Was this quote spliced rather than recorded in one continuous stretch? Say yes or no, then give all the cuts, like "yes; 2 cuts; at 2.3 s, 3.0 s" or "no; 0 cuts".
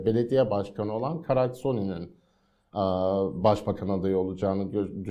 no; 0 cuts